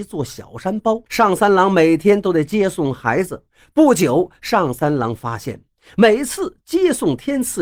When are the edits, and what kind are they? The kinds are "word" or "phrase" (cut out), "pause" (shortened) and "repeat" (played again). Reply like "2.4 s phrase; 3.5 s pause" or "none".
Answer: 1.1 s pause